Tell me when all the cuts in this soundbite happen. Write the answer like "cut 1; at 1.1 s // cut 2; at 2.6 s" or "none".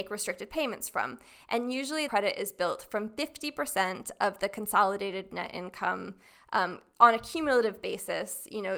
cut 1; at 2.1 s